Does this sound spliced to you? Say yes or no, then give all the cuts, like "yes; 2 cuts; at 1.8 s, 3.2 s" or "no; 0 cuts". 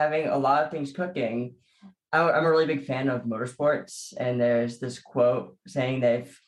no; 0 cuts